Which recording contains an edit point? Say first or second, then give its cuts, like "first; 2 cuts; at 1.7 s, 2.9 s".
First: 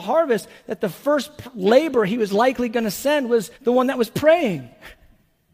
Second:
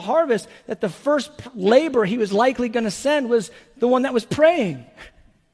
first; 1 cut; at 3.5 s